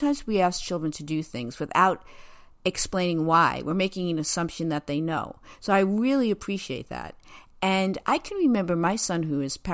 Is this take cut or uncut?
uncut